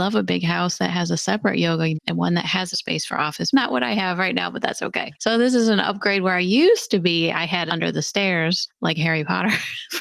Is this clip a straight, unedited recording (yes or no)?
no